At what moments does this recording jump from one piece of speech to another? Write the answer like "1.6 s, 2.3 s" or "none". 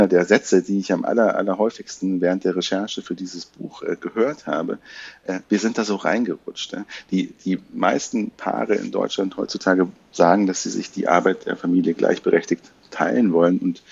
none